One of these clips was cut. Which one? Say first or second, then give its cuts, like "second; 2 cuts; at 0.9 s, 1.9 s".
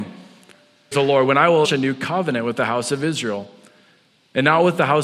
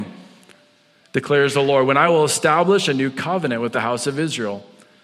first; 2 cuts; at 0.9 s, 1.6 s